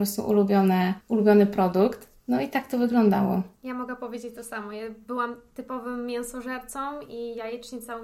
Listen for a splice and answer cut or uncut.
cut